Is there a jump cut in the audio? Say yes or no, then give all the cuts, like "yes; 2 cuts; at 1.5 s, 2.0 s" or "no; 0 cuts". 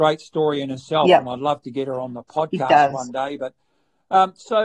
no; 0 cuts